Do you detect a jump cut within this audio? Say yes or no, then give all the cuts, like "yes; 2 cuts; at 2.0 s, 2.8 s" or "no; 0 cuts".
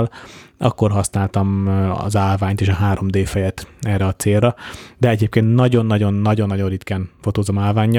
no; 0 cuts